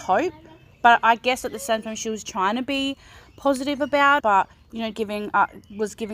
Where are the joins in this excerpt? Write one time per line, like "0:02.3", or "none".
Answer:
0:04.2
0:04.5
0:04.9